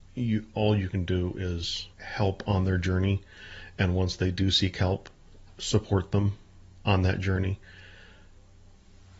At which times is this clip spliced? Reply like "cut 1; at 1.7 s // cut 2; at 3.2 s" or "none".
cut 1; at 1.9 s